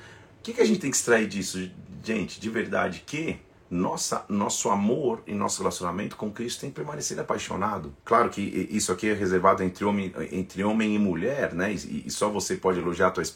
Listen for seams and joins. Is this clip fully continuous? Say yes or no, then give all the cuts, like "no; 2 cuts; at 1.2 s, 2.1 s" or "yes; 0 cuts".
no; 2 cuts; at 3.5 s, 8.0 s